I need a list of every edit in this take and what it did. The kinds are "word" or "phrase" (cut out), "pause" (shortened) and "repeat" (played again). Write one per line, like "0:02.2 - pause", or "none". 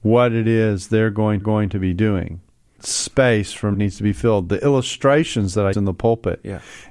0:01.4 - repeat
0:02.8 - word
0:03.7 - phrase
0:05.7 - word